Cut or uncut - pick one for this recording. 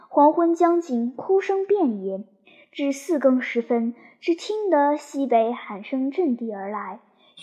uncut